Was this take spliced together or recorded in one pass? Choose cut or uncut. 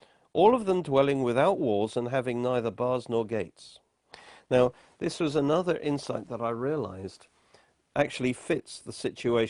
uncut